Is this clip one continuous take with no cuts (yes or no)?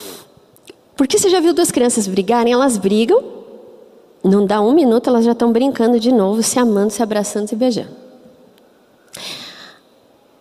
yes